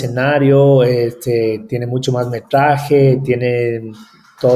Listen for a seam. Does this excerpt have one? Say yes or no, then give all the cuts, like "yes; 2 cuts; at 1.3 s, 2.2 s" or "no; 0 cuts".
no; 0 cuts